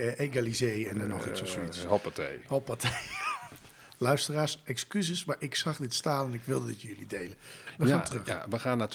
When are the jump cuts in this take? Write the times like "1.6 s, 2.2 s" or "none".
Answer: none